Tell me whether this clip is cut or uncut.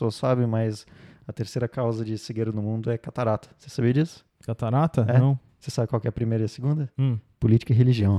uncut